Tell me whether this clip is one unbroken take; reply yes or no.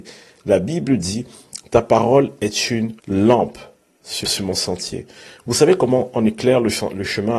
no